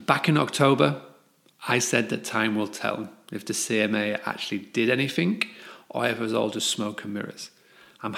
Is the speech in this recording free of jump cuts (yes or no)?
yes